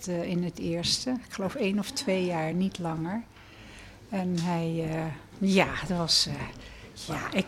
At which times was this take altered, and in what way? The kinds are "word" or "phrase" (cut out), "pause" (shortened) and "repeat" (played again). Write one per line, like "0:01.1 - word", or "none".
none